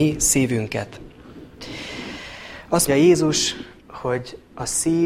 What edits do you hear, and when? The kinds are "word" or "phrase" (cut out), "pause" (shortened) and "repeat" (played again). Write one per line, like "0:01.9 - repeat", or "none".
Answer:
0:02.9 - word
0:03.8 - pause